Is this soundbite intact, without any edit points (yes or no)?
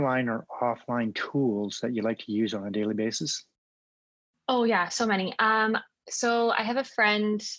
yes